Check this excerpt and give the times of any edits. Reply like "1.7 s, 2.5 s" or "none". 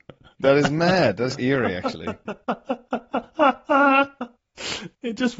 1.4 s